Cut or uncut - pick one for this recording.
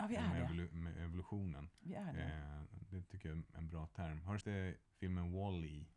cut